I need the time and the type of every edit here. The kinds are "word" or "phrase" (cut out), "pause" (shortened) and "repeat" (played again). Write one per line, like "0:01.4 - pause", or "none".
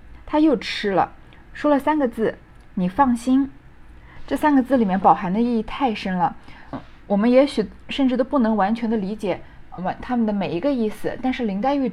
0:06.7 - word
0:09.8 - word